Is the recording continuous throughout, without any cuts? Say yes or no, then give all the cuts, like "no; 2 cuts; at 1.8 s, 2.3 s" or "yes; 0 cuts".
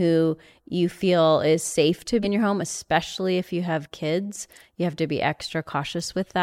no; 1 cut; at 2.2 s